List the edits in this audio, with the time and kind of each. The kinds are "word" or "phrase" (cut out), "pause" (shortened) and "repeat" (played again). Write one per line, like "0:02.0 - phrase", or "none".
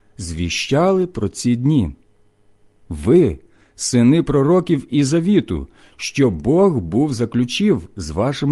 none